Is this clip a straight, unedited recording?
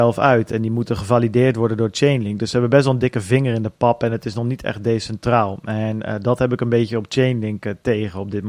yes; 0 cuts

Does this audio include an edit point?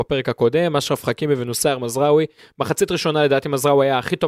no; 0 cuts

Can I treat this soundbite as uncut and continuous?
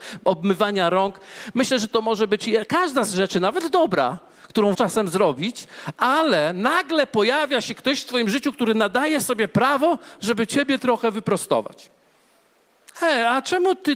no; 1 cut; at 4.7 s

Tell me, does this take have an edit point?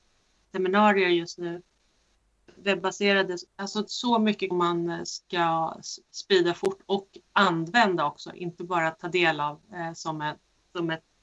yes; 2 cuts; at 3.5 s, 4.5 s

